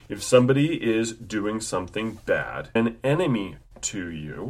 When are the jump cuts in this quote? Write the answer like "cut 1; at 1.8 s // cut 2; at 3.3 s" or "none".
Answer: cut 1; at 2.8 s